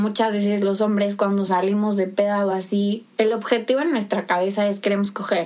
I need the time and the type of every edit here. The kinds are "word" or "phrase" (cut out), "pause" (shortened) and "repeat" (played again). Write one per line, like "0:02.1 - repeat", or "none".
none